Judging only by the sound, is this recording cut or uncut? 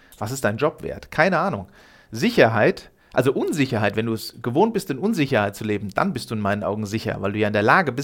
uncut